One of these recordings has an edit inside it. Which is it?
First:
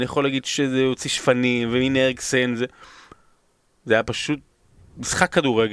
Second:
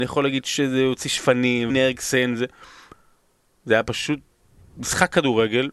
second; 1 cut; at 1.7 s

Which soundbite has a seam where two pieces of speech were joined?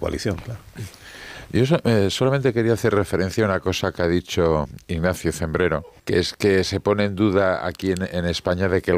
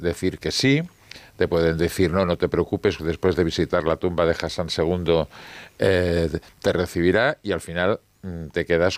first; 1 cut; at 6.0 s

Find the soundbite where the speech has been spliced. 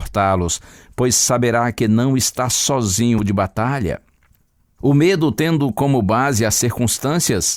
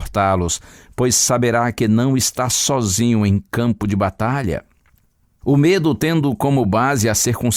first; 1 cut; at 3.2 s

